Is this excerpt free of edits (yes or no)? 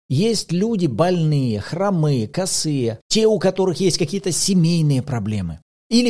yes